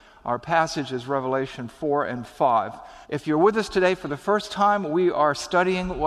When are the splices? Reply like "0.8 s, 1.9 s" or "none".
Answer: 3.0 s